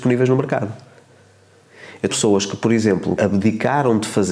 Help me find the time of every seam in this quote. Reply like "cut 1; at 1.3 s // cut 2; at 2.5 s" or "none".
cut 1; at 2.1 s // cut 2; at 3.2 s